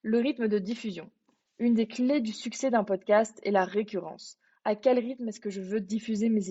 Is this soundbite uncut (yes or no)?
yes